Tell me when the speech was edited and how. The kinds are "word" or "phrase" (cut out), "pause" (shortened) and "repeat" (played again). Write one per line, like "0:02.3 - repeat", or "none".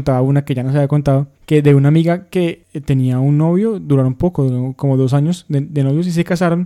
0:01.4 - pause